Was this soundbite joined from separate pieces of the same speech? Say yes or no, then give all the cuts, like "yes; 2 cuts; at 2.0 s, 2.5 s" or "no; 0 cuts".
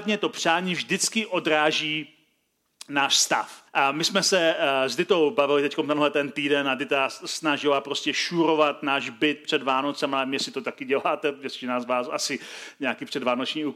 yes; 1 cut; at 3.7 s